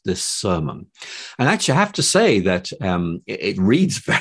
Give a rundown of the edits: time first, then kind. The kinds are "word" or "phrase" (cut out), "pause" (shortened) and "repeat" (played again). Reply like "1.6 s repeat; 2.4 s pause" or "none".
none

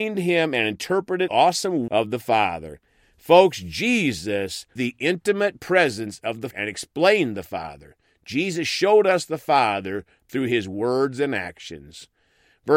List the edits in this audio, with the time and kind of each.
1.3 s phrase; 1.9 s word; 4.8 s phrase; 6.5 s word

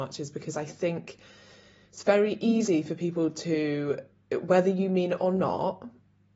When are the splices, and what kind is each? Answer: none

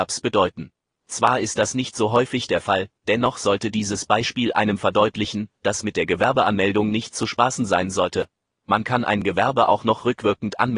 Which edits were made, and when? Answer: none

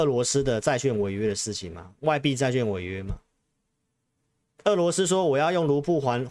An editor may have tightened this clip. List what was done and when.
none

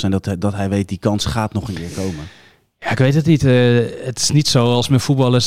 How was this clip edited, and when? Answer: none

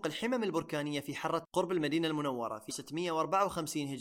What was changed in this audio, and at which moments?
1.4 s word; 2.7 s word

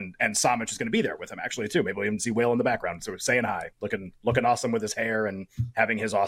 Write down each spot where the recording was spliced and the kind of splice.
3.7 s pause

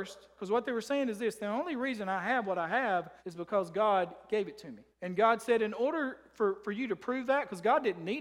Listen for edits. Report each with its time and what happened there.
3.2 s pause; 4.9 s pause

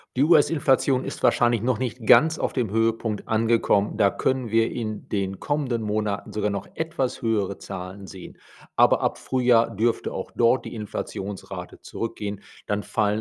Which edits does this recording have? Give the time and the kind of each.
none

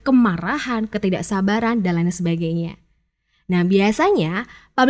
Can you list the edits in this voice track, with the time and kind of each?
none

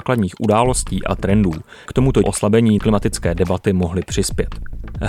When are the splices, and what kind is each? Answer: 1.9 s word; 2.2 s word; 2.8 s word

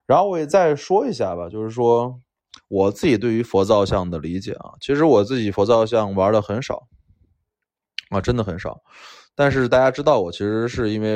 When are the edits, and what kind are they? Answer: none

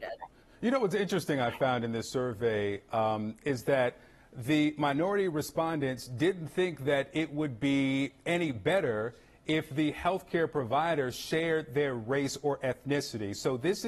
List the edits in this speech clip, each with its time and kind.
none

